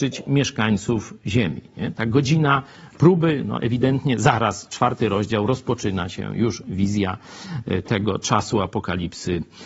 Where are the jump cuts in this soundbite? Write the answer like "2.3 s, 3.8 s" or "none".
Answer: none